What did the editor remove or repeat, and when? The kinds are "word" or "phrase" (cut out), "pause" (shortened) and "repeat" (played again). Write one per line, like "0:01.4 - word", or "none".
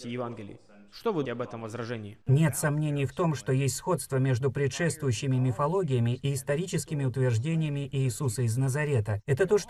0:01.3 - word
0:02.2 - pause

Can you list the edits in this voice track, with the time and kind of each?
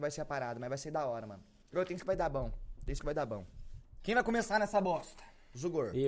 0:01.6 - pause
0:02.0 - word
0:03.0 - word

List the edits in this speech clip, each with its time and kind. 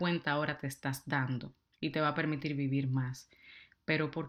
0:01.7 - pause

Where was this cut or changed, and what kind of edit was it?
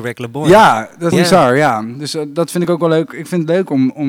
0:01.1 - phrase

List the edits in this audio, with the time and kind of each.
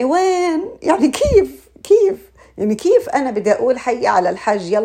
none

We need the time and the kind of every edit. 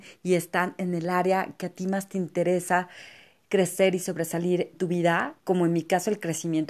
0:04.7 - word
0:05.4 - pause

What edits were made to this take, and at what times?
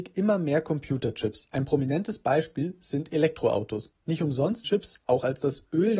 0:04.6 - word

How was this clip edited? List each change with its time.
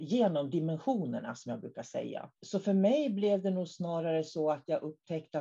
0:02.4 - pause

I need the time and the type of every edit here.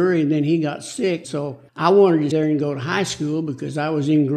0:01.2 - word
0:01.7 - pause
0:02.3 - word

